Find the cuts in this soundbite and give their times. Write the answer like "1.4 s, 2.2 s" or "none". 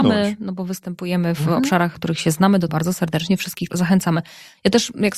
1.9 s, 2.7 s, 3.7 s